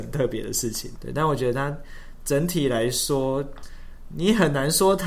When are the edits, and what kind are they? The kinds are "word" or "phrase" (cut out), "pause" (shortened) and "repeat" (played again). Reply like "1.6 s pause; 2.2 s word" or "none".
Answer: 1.0 s word